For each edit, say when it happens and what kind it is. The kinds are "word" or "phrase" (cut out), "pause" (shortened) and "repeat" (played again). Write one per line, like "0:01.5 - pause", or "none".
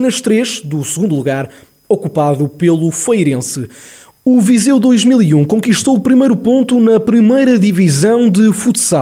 none